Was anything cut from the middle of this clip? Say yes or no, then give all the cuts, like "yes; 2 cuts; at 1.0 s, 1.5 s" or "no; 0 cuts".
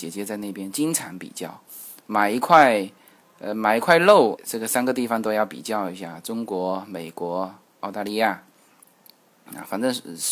yes; 1 cut; at 4.4 s